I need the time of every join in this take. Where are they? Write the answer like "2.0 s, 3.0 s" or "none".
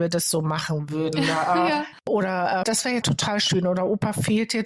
2.6 s, 3.0 s